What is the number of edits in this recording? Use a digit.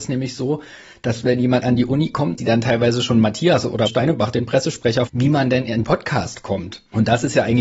5